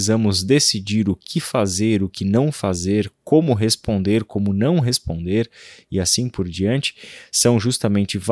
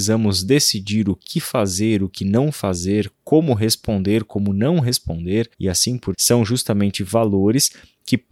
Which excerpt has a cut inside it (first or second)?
second